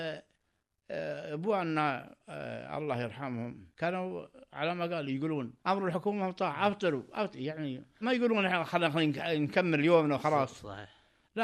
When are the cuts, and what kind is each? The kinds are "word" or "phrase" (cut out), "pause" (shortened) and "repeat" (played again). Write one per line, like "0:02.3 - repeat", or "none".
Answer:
0:02.2 - pause
0:05.6 - pause
0:08.0 - word